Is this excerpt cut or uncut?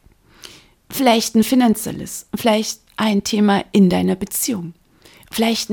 cut